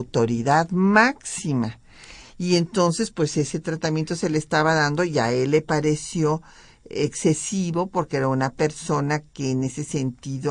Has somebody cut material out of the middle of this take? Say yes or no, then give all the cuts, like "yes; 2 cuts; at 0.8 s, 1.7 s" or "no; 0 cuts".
no; 0 cuts